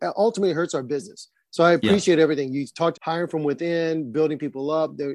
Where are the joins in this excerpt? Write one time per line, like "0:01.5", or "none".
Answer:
0:02.9

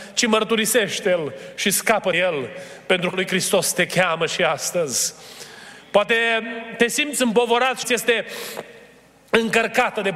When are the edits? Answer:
0:02.1
0:03.1
0:07.8

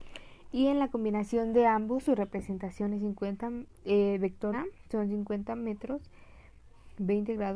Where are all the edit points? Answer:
0:04.5

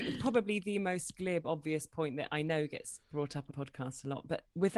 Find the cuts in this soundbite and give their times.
0:03.5

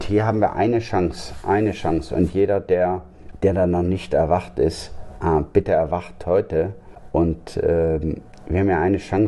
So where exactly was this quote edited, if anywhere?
none

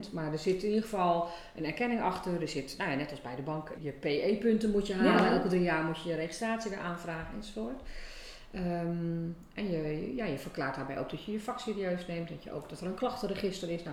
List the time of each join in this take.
0:03.8

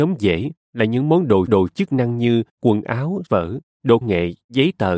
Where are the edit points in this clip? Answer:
0:01.5
0:02.5
0:03.3
0:04.0

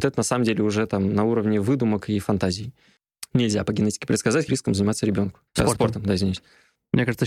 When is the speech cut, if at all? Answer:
0:04.5
0:05.5

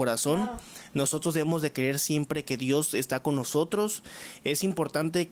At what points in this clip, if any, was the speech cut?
none

